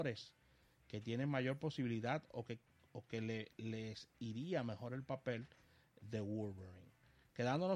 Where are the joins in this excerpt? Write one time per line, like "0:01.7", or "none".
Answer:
none